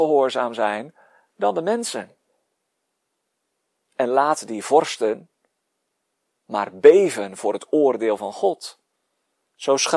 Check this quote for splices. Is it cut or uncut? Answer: uncut